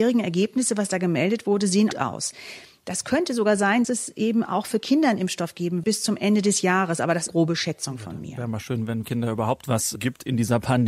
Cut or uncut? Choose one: cut